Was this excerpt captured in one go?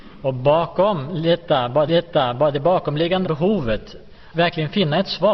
no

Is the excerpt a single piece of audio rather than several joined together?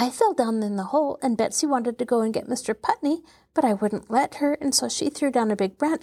yes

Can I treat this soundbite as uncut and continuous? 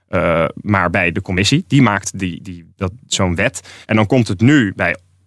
no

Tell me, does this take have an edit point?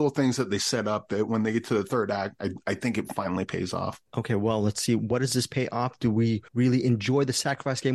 yes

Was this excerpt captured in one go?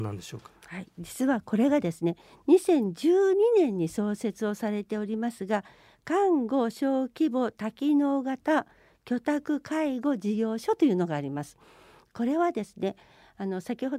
yes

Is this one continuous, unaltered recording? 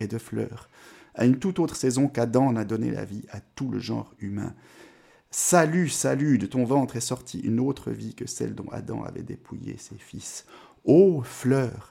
yes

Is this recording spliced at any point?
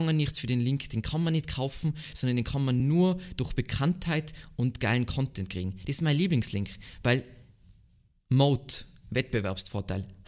no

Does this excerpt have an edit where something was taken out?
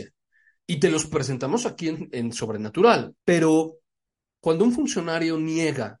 yes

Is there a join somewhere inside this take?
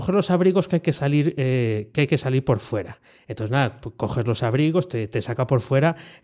no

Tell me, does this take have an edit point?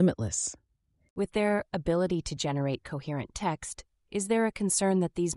no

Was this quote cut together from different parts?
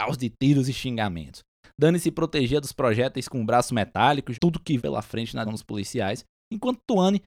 yes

